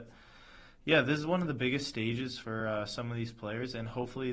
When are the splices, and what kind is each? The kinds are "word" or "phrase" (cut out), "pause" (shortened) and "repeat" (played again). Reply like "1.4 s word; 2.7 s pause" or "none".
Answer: none